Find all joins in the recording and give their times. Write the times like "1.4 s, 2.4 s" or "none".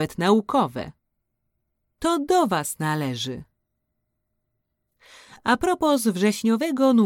none